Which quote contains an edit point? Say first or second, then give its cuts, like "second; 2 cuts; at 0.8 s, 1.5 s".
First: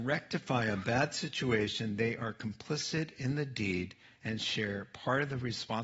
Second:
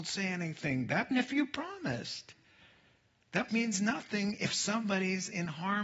second; 2 cuts; at 1.1 s, 3.5 s